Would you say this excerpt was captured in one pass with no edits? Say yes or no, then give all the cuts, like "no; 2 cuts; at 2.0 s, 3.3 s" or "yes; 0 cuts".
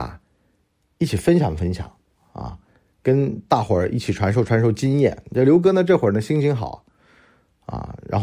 yes; 0 cuts